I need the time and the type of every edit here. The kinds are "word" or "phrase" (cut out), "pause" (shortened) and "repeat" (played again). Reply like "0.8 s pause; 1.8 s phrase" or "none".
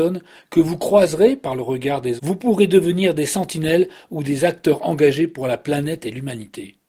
2.2 s word